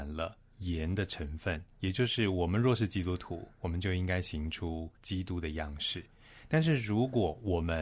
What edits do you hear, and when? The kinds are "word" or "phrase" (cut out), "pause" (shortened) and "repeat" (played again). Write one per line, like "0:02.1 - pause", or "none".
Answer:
0:01.7 - pause
0:05.0 - pause